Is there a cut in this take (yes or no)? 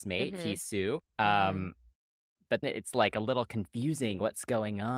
yes